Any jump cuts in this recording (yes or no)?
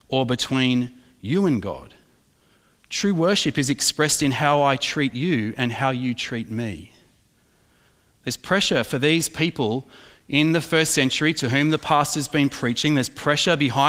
no